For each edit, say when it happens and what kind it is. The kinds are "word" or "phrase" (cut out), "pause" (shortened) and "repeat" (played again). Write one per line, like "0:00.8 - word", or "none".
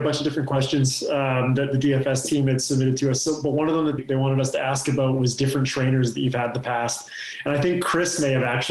0:04.0 - word